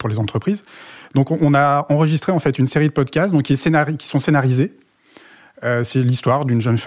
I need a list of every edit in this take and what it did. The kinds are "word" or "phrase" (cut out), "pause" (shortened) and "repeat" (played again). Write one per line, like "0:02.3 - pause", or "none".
none